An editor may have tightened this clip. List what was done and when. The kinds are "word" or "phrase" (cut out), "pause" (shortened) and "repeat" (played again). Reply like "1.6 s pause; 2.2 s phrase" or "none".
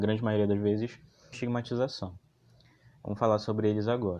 1.3 s phrase